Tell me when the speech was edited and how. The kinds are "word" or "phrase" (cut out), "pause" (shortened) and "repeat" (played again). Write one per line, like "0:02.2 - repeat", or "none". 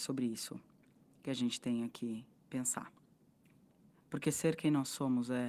none